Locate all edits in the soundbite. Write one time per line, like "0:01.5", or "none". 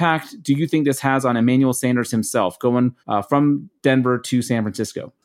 0:03.0

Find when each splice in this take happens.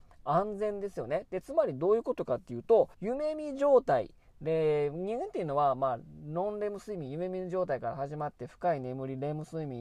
0:02.9

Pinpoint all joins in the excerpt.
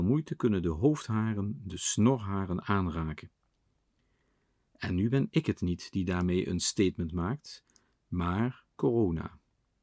none

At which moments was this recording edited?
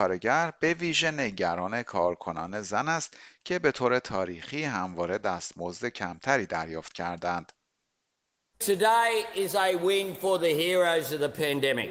none

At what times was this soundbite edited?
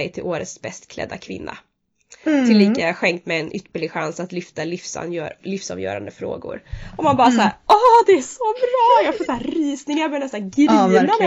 none

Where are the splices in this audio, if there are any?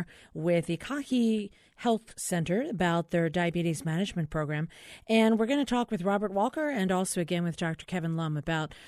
none

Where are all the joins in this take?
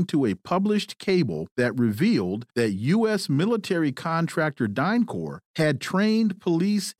0:01.5
0:02.5
0:05.5

